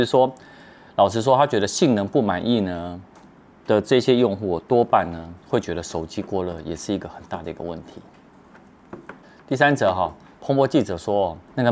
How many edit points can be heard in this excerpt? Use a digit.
1